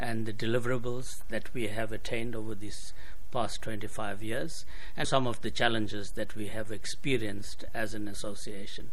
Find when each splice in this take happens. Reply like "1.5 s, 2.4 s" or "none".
5.0 s, 7.7 s